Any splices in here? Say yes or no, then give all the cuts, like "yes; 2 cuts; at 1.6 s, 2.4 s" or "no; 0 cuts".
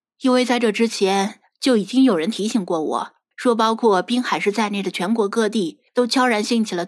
yes; 2 cuts; at 3.3 s, 5.9 s